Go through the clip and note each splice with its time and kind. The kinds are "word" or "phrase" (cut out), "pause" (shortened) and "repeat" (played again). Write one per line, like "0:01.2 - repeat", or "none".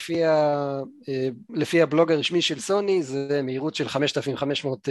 0:01.4 - pause